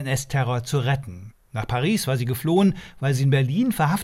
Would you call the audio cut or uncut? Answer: uncut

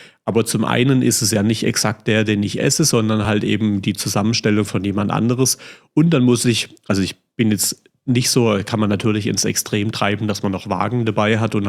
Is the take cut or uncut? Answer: uncut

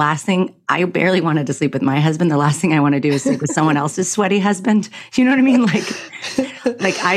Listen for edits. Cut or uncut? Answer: uncut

